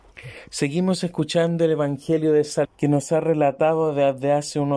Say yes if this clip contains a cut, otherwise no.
yes